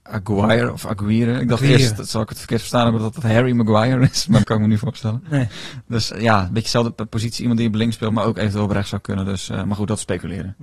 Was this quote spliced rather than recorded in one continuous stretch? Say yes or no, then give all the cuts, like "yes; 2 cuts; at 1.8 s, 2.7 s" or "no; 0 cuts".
yes; 2 cuts; at 4.4 s, 6.1 s